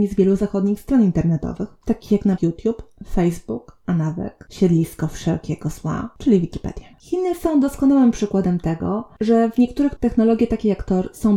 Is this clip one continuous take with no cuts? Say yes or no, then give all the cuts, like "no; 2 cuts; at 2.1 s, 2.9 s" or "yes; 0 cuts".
no; 3 cuts; at 2.4 s, 6.9 s, 10.0 s